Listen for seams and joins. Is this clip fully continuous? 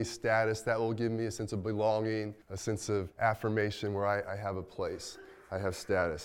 no; 2 cuts; at 2.4 s, 3.1 s

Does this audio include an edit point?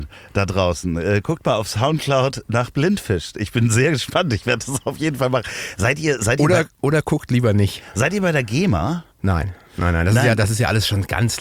yes; 1 cut; at 9.1 s

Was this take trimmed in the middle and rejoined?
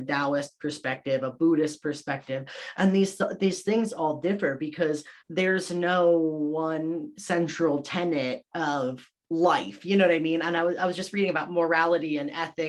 yes; 1 cut; at 5.2 s

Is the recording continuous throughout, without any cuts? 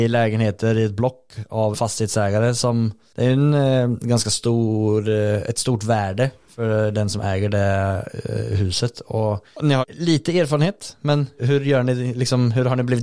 no; 3 cuts; at 1.7 s, 9.8 s, 11.4 s

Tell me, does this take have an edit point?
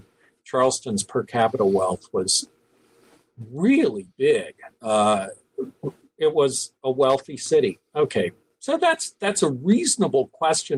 no; 0 cuts

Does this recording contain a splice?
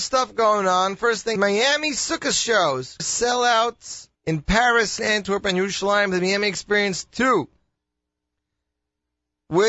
yes; 4 cuts; at 1.4 s, 3.0 s, 4.1 s, 5.0 s

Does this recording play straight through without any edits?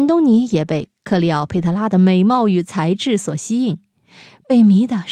yes; 0 cuts

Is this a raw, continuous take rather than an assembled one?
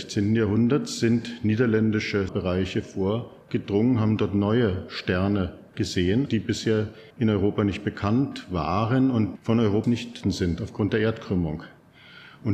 no; 6 cuts; at 2.3 s, 6.3 s, 7.1 s, 9.4 s, 9.8 s, 10.2 s

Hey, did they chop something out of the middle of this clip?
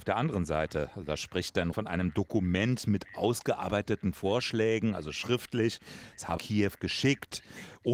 yes; 2 cuts; at 1.7 s, 6.4 s

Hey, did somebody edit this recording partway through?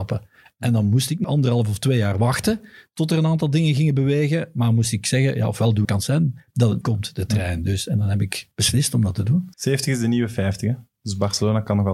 yes; 5 cuts; at 1.2 s, 5.8 s, 6.8 s, 8.5 s, 9.5 s

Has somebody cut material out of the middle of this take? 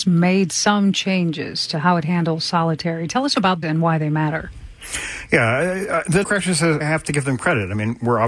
yes; 3 cuts; at 3.6 s, 6.2 s, 6.8 s

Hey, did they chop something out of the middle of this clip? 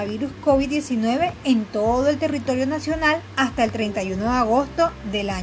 no; 0 cuts

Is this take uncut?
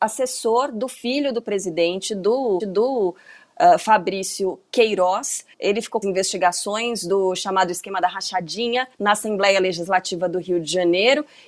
no; 4 cuts; at 2.6 s, 5.5 s, 6.0 s, 8.9 s

